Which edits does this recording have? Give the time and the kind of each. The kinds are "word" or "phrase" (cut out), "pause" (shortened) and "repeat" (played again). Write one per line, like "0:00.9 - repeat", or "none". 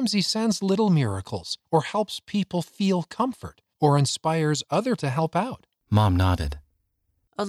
0:01.6 - pause
0:03.7 - pause
0:05.0 - word
0:05.8 - pause